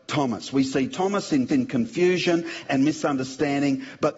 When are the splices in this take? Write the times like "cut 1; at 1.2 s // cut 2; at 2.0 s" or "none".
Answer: cut 1; at 1.5 s